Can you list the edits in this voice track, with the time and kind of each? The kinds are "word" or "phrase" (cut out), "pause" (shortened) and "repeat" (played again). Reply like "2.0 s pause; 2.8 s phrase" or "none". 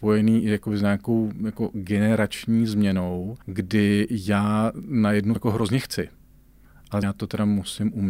3.4 s pause; 5.4 s word; 7.0 s word